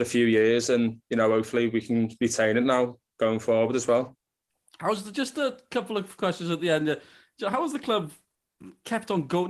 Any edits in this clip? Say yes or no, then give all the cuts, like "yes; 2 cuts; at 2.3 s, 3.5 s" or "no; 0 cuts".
no; 0 cuts